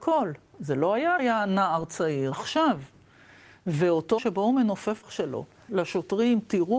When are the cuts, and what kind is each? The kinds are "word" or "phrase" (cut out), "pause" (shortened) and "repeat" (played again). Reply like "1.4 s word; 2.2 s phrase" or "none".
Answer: 1.2 s word; 2.3 s word; 4.2 s word; 5.0 s word; 5.7 s word